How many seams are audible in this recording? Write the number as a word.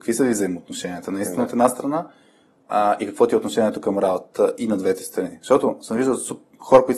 zero